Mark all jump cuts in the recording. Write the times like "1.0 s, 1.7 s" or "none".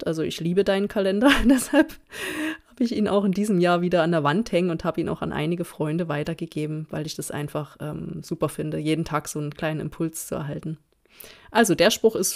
none

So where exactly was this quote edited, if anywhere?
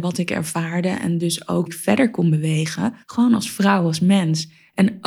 1.7 s, 3.0 s

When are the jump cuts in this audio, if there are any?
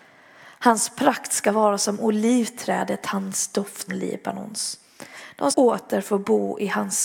3.9 s, 5.5 s

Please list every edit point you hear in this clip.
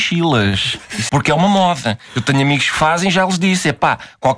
1.1 s

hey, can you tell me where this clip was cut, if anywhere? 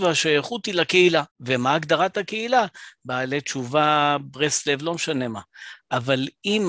1.3 s

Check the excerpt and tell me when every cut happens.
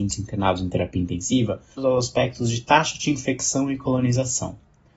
1.8 s

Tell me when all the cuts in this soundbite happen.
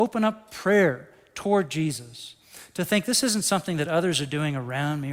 none

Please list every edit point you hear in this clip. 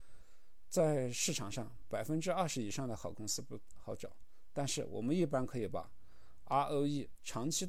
none

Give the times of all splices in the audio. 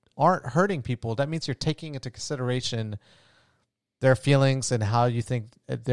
none

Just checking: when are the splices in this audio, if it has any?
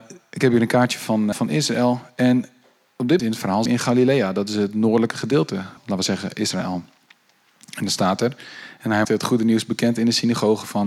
1.3 s, 3.2 s, 3.7 s, 5.8 s, 9.0 s

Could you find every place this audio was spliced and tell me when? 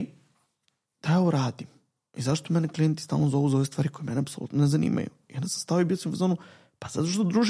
1.0 s

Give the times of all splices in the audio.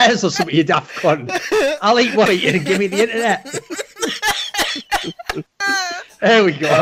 2.2 s

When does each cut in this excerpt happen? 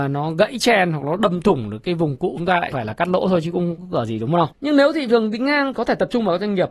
2.4 s, 2.7 s, 3.8 s, 4.5 s, 5.7 s

